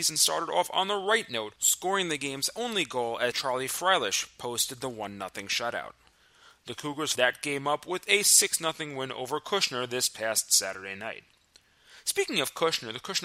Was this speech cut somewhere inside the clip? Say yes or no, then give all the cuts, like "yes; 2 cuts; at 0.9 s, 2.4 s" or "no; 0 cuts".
yes; 2 cuts; at 3.3 s, 7.1 s